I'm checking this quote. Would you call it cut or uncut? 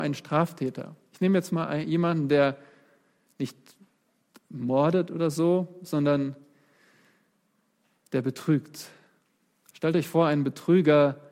uncut